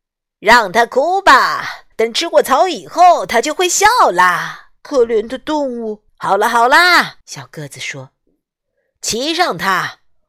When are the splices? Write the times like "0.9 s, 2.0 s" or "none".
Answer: 1.9 s, 4.8 s, 6.1 s, 7.2 s